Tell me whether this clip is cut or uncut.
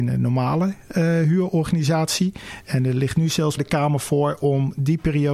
cut